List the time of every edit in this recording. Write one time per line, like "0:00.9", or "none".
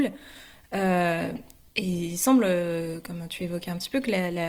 none